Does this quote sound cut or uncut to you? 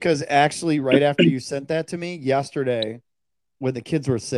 cut